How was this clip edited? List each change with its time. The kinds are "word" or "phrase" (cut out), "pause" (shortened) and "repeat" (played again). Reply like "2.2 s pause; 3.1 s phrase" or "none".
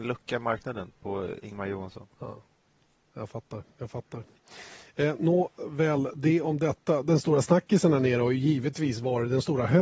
none